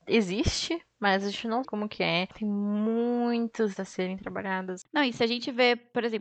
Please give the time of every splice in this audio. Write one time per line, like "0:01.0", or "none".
0:01.6
0:03.8